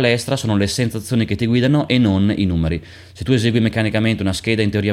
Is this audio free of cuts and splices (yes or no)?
yes